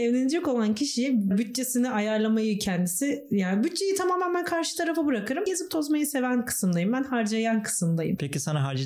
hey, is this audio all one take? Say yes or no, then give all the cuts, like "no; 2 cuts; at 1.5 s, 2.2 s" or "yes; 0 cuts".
yes; 0 cuts